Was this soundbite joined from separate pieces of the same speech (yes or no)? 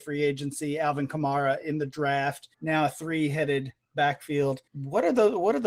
yes